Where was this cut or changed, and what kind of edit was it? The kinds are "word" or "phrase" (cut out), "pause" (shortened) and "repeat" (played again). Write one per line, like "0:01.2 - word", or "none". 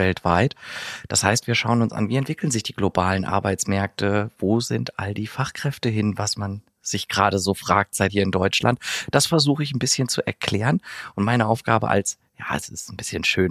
0:08.1 - phrase